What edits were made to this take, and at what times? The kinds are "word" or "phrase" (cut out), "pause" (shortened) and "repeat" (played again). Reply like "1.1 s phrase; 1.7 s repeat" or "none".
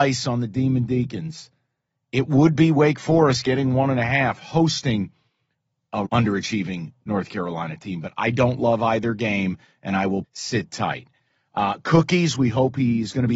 6.1 s word; 10.2 s word